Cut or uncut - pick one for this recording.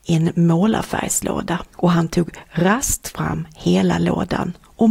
cut